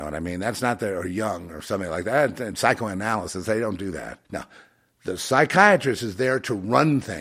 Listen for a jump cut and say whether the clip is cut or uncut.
cut